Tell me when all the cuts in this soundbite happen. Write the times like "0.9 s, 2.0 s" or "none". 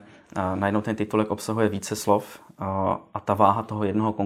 none

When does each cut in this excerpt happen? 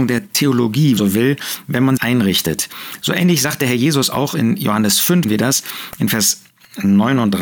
1.0 s, 2.0 s, 5.2 s

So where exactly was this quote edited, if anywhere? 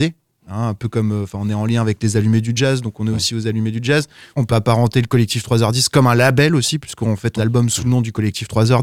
7.4 s

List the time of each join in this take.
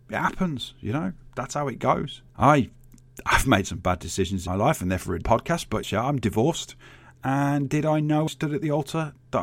2.3 s, 4.5 s, 5.2 s, 5.8 s, 8.3 s

